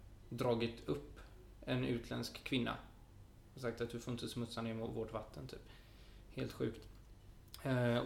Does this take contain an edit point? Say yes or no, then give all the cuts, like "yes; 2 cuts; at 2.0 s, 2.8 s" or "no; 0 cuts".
no; 0 cuts